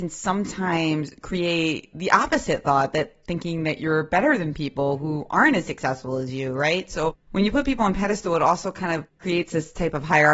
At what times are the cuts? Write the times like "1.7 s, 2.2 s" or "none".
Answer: 7.2 s